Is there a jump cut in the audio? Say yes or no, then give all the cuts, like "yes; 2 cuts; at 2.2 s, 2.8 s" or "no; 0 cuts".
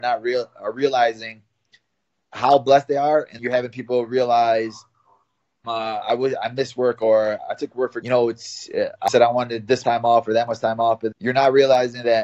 yes; 6 cuts; at 3.4 s, 5.6 s, 8.0 s, 9.1 s, 9.8 s, 11.1 s